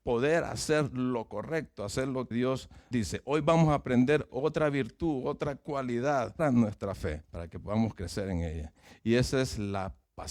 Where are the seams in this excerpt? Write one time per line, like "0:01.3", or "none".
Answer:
0:02.3
0:02.9
0:04.3
0:06.4
0:07.2